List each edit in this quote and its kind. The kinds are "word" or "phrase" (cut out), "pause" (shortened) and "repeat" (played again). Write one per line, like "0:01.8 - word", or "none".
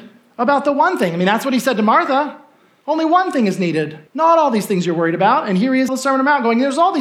0:04.1 - pause
0:05.9 - phrase